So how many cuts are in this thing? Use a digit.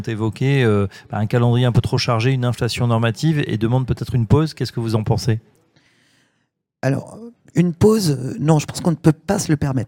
0